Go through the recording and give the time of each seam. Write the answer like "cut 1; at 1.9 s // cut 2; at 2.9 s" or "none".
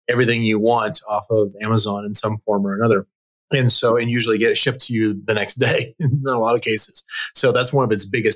none